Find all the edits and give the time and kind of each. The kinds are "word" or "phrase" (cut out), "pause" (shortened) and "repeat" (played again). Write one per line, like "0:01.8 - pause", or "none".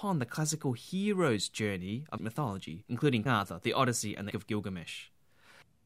0:02.2 - word
0:03.3 - word
0:04.3 - phrase